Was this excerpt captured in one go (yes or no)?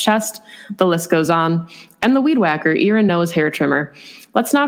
yes